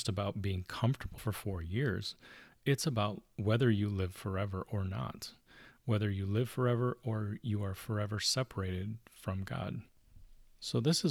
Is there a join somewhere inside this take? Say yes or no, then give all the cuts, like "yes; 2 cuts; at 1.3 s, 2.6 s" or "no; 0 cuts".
yes; 1 cut; at 1.2 s